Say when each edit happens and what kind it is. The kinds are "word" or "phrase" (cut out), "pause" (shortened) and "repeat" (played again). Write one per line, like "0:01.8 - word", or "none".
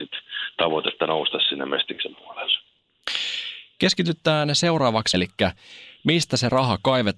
0:05.1 - phrase